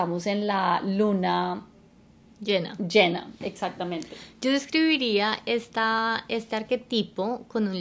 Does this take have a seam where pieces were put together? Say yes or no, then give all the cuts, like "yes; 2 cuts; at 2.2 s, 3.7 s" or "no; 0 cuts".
no; 0 cuts